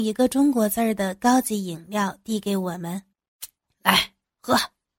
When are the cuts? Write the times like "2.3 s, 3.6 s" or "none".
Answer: 3.1 s